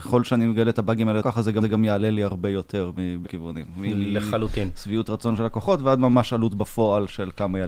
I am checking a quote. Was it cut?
yes; 3 cuts; at 1.2 s, 1.6 s, 3.2 s

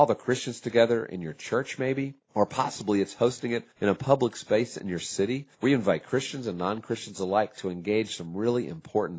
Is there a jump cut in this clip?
yes; 3 cuts; at 2.2 s, 3.7 s, 5.5 s

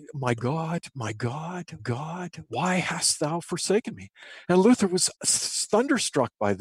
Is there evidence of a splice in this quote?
yes; 2 cuts; at 1.8 s, 5.2 s

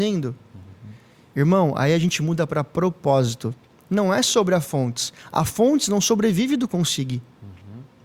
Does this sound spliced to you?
no; 0 cuts

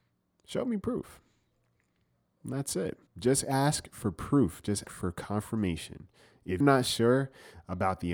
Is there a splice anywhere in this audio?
yes; 3 cuts; at 3.1 s, 4.8 s, 6.6 s

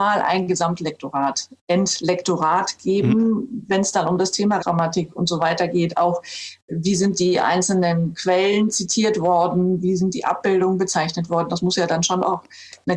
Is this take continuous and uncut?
no; 1 cut; at 4.6 s

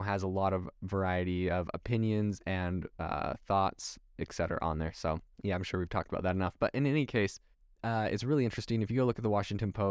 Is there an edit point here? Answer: yes; 2 cuts; at 5.3 s, 7.5 s

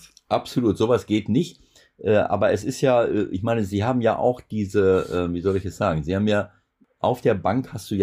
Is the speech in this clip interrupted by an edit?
no; 0 cuts

